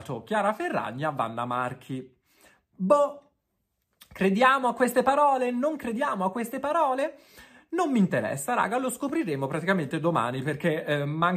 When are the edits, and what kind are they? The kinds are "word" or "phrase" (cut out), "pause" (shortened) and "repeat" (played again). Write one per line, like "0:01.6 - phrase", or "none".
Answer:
none

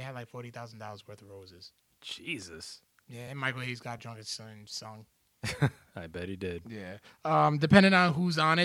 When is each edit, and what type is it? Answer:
none

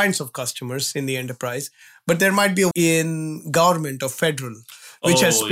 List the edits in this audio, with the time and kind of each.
0:02.7 - word

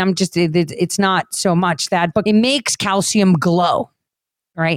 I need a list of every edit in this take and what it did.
0:01.9 - word
0:02.3 - phrase

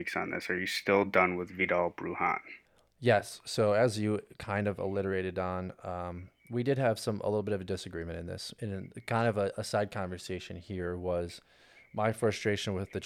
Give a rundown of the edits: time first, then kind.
none

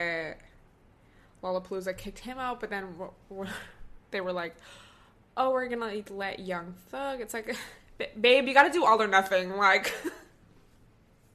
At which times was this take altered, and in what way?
0:04.0 - pause

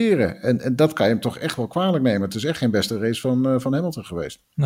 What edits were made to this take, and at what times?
none

